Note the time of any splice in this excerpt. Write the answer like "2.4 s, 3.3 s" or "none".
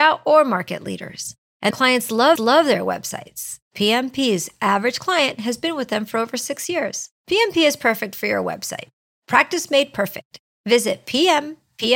1.7 s, 2.4 s, 7.2 s